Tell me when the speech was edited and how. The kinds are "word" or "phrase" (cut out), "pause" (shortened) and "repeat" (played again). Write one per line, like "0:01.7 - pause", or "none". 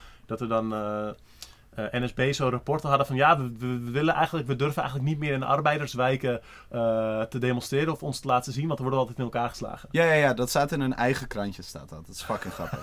none

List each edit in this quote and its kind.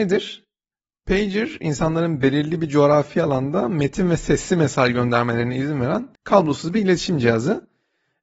0:06.1 - pause

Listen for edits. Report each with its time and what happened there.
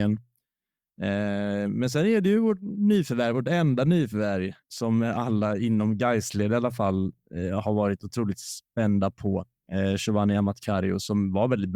0:04.6 - pause

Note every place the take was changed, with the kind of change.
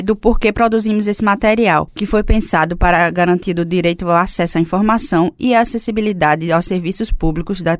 none

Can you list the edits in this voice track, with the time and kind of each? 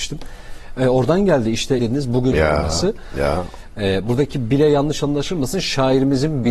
0:01.8 - phrase
0:02.3 - phrase

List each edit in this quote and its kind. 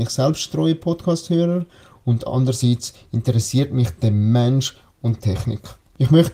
none

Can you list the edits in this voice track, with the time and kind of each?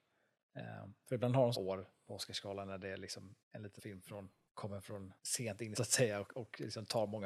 0:01.5 - word
0:03.4 - pause
0:03.8 - word
0:04.5 - pause
0:05.2 - pause
0:05.7 - phrase

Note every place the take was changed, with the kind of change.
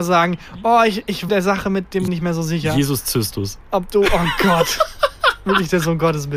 0:01.3 - phrase
0:02.1 - phrase

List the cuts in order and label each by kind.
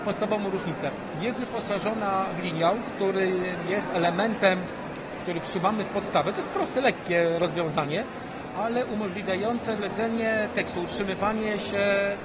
0:09.8 - word

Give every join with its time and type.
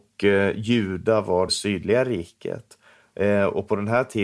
0:01.5 - phrase

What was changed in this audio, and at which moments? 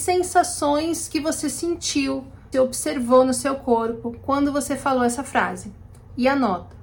0:02.5 - word

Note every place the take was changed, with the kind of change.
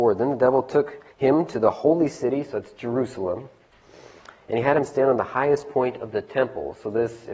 0:01.1 - pause

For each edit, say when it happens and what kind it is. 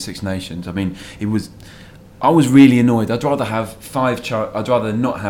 none

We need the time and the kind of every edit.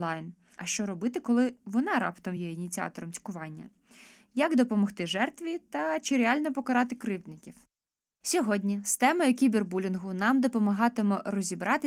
none

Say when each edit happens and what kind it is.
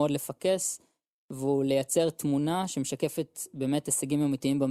none

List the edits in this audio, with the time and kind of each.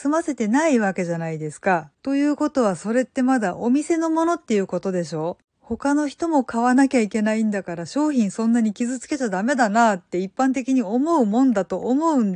0:01.9 - pause

